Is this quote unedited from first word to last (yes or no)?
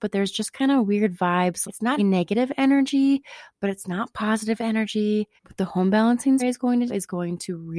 no